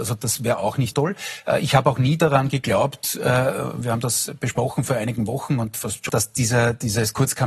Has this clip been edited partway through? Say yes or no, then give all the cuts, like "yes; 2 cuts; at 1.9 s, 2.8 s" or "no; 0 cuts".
yes; 2 cuts; at 0.9 s, 6.1 s